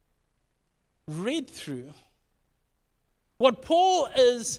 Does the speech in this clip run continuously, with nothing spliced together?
yes; 0 cuts

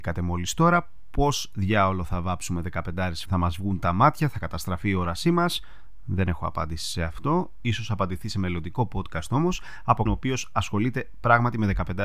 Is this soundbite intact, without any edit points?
no; 2 cuts; at 3.3 s, 10.1 s

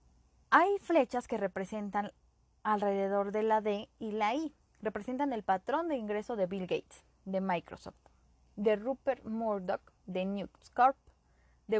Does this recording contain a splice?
no; 0 cuts

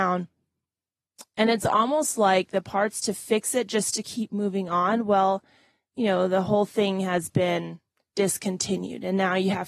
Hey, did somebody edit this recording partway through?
no; 0 cuts

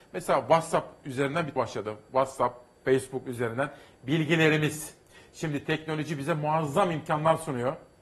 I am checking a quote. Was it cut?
yes; 1 cut; at 1.6 s

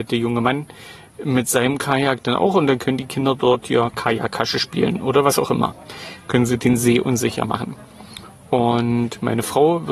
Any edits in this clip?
no; 0 cuts

